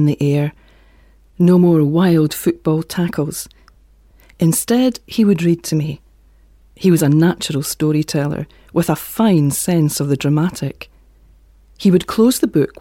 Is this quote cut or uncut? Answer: uncut